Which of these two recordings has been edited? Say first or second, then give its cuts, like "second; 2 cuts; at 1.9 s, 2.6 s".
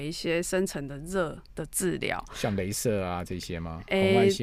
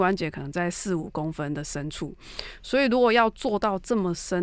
first; 1 cut; at 1.5 s